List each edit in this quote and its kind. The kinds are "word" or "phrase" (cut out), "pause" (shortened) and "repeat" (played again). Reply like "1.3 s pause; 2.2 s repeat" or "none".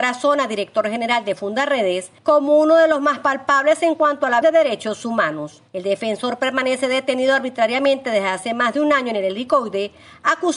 2.2 s pause; 4.4 s word; 5.7 s pause

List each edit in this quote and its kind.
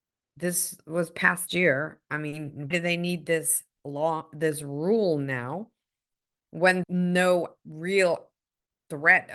1.5 s word; 2.7 s word; 6.8 s word

